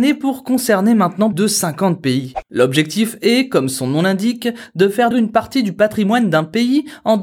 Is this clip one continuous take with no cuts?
no; 2 cuts; at 1.3 s, 5.1 s

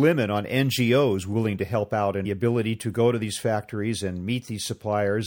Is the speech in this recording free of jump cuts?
no; 1 cut; at 2.2 s

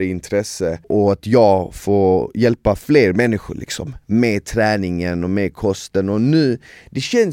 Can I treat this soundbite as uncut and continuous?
yes; 0 cuts

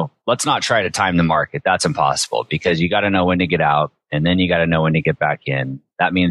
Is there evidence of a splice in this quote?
no; 0 cuts

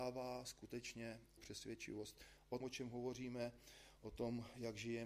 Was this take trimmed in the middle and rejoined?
yes; 2 cuts; at 1.4 s, 2.6 s

